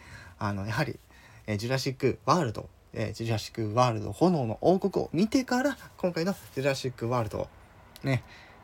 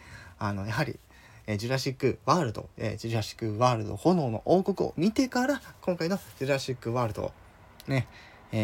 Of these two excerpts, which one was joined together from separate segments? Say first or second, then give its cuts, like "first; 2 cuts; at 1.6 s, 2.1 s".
second; 1 cut; at 2.7 s